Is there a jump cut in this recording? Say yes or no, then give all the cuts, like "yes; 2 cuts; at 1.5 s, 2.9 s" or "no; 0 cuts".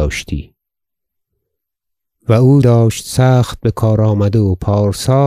yes; 1 cut; at 2.6 s